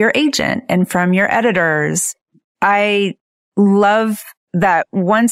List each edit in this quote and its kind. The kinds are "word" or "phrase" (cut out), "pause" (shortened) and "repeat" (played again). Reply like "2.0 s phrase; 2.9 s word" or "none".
none

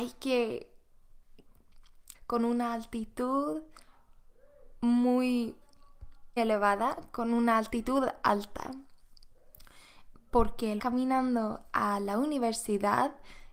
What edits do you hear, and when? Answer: 2.1 s phrase; 6.4 s word; 10.8 s phrase

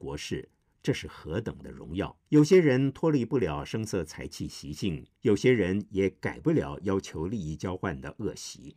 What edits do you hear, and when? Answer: 2.2 s pause; 5.2 s pause

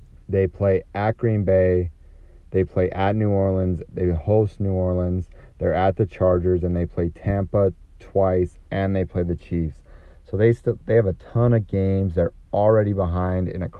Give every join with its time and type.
none

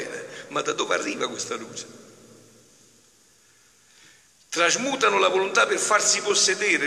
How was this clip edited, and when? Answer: none

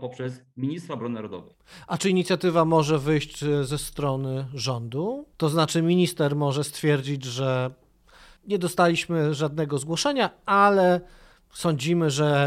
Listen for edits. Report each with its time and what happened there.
5.3 s pause; 8.4 s pause

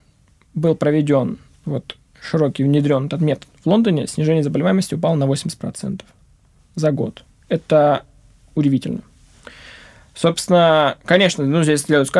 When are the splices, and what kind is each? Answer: none

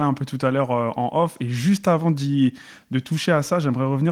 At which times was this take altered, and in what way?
none

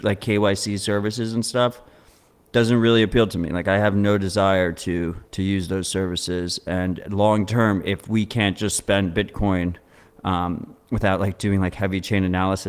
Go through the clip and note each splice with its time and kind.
5.2 s pause

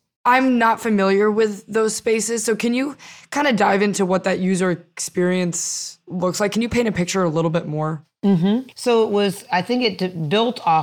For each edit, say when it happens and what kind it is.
8.7 s pause

